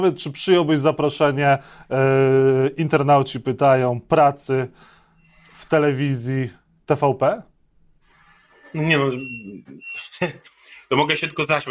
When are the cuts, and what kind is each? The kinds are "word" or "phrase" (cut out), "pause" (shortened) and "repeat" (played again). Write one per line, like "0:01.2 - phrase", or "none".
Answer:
none